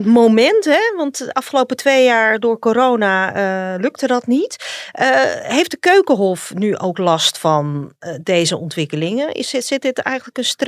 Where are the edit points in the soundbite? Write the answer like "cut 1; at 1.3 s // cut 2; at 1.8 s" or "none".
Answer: none